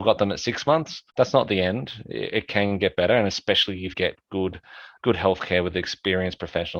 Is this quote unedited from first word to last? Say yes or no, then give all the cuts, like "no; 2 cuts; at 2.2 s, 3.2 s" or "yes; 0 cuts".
no; 3 cuts; at 1.1 s, 3.9 s, 5.0 s